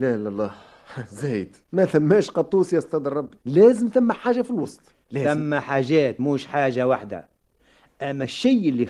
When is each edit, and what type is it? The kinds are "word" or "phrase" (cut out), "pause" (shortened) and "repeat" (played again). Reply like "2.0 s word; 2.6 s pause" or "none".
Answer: 1.6 s pause; 3.4 s pause